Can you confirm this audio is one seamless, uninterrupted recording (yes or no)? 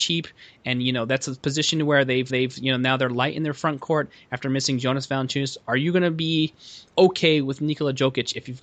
no